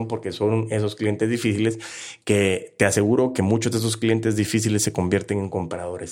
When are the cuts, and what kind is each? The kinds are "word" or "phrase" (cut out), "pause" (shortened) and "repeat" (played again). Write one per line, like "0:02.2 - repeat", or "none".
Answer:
none